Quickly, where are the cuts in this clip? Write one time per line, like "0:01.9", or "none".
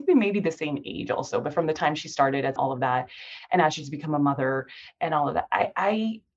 0:02.6